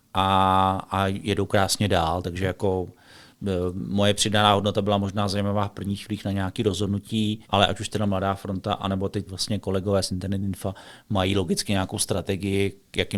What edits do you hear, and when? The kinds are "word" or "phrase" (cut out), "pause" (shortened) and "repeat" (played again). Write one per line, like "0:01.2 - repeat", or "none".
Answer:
0:07.4 - pause
0:09.3 - word